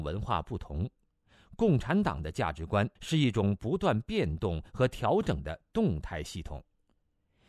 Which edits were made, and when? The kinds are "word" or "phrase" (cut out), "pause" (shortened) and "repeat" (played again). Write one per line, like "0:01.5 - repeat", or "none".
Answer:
0:03.0 - pause